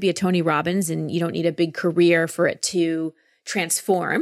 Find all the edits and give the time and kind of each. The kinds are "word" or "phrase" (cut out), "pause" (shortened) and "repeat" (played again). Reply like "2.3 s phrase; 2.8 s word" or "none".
none